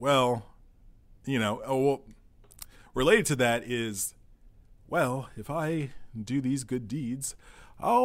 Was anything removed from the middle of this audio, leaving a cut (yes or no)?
yes